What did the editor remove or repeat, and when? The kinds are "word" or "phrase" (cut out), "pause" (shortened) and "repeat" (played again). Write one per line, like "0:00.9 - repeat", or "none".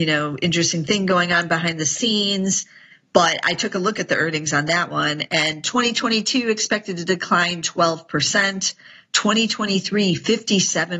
none